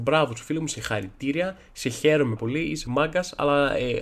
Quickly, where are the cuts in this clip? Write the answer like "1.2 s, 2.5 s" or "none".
2.4 s, 2.9 s